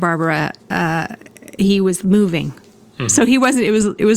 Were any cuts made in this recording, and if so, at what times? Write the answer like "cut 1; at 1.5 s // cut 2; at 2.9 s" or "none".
none